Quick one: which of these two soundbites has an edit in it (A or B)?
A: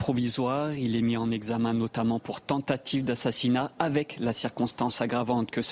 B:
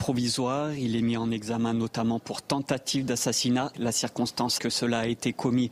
B